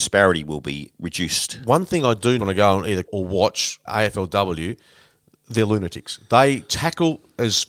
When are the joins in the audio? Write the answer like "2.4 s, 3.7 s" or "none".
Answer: 2.4 s, 3.1 s, 3.9 s